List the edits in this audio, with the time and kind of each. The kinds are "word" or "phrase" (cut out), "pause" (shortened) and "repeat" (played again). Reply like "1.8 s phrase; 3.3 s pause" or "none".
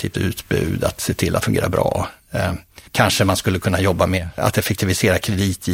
1.4 s word; 2.9 s pause; 4.4 s word